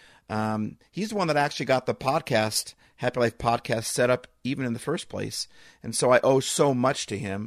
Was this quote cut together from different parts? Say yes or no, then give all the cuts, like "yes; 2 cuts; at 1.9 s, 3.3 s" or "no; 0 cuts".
no; 0 cuts